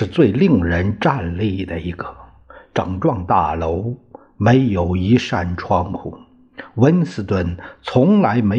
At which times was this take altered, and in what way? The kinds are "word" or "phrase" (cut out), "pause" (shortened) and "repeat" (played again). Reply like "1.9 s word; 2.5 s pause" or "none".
none